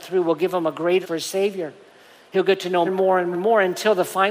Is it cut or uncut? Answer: cut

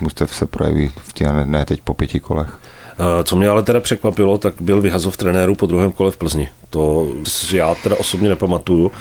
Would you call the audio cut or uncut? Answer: cut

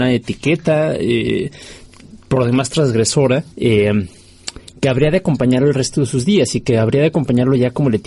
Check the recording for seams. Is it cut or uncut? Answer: cut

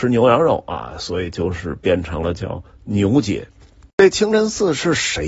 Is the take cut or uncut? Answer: uncut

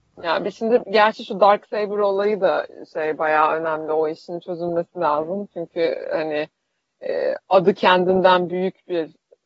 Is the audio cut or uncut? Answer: uncut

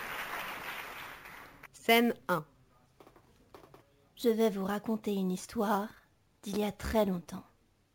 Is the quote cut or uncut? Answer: cut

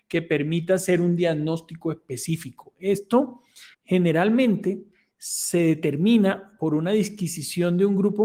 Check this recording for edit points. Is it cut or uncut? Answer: cut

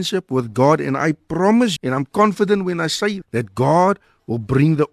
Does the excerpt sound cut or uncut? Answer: cut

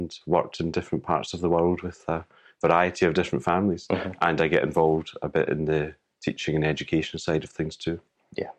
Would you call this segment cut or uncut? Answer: uncut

